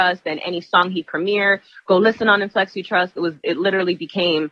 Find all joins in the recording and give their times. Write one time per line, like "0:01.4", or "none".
0:03.2